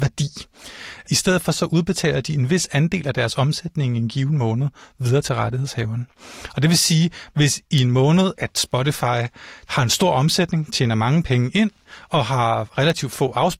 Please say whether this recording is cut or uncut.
uncut